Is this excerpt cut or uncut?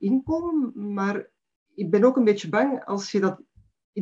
uncut